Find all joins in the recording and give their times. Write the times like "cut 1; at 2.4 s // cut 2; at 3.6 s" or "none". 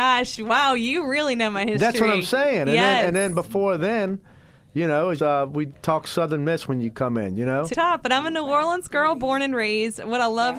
cut 1; at 5.2 s // cut 2; at 7.7 s